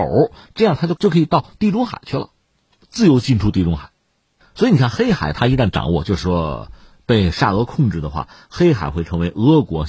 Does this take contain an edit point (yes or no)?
no